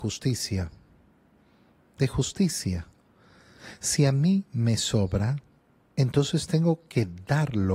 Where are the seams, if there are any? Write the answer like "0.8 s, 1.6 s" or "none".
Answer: none